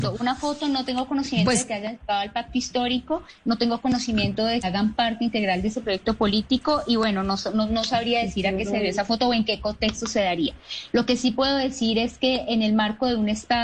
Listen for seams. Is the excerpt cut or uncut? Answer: cut